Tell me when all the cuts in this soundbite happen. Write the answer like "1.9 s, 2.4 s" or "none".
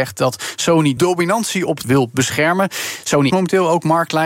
1.0 s, 1.8 s, 3.3 s